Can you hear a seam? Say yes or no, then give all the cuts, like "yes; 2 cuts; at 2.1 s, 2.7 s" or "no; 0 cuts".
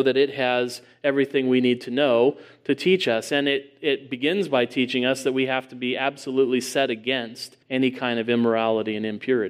yes; 1 cut; at 7.6 s